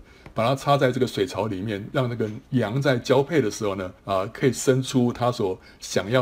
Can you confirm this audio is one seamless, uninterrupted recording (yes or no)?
no